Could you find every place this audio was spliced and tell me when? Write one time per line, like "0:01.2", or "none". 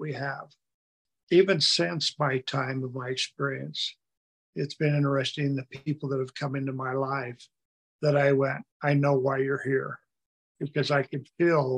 0:08.7